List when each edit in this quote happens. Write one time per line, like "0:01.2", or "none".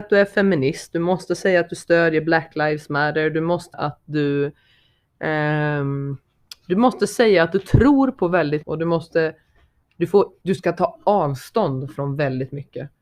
0:03.7
0:08.6
0:10.4

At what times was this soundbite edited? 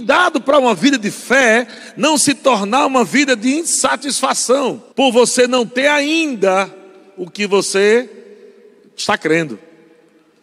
0:04.9

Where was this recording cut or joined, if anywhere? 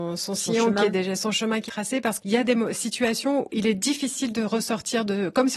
0:01.7
0:02.2
0:03.5

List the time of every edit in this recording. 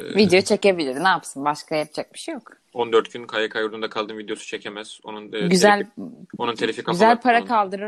0:02.6
0:06.3

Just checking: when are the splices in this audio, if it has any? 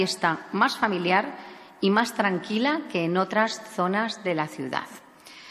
none

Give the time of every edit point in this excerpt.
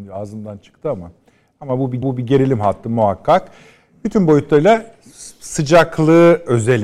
0:02.0

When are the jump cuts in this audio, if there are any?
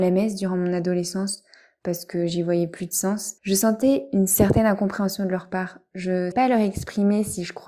0:03.4
0:06.3

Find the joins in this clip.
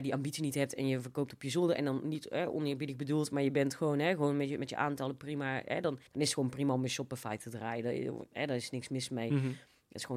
0:06.1

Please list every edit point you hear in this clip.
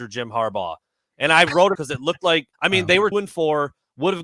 0:01.7
0:02.5
0:03.1

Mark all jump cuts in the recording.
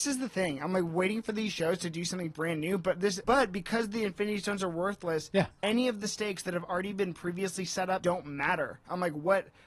0:03.2
0:08.0

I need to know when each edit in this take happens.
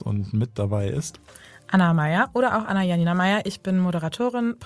none

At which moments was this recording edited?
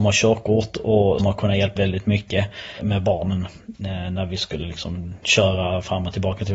0:01.2
0:01.8

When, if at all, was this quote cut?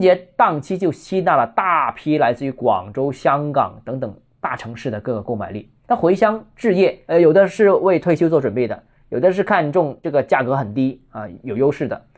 none

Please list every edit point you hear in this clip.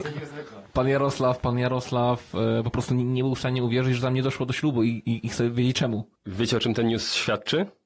0:06.2

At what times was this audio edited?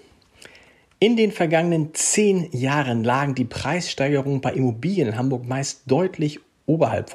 none

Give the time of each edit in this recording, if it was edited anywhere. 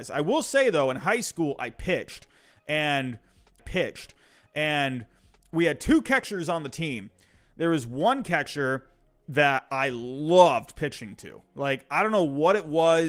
0:03.6

